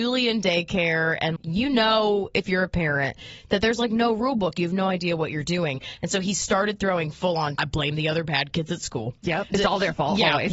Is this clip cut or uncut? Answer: cut